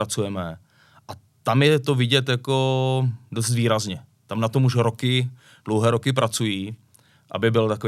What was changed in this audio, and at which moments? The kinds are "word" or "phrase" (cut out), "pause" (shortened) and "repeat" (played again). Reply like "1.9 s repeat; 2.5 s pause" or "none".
none